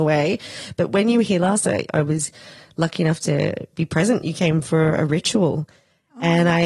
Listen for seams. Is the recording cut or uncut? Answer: uncut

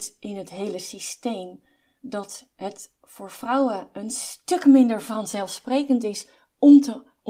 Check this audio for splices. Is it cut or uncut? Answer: uncut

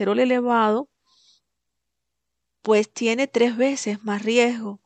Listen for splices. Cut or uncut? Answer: uncut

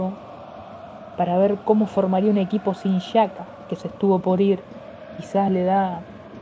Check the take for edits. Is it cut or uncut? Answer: uncut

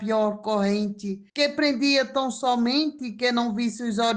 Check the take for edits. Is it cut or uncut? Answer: cut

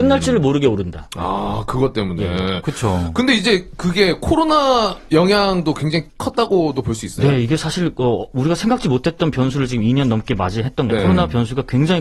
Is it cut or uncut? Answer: cut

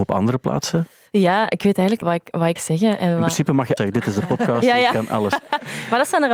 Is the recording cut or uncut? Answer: cut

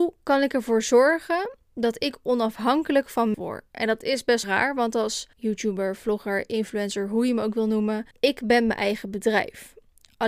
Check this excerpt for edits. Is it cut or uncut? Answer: cut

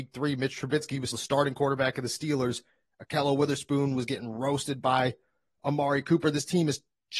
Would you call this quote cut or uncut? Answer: cut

